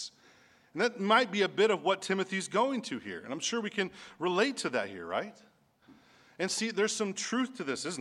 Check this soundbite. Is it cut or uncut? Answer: uncut